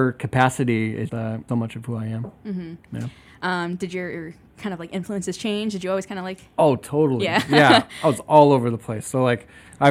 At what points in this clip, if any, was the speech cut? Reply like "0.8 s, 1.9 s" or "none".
1.1 s, 1.5 s